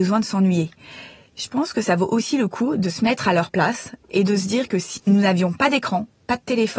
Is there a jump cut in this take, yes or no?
yes